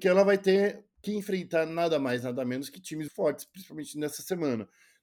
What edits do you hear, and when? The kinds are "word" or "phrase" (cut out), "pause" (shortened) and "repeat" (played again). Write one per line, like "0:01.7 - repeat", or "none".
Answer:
0:03.1 - word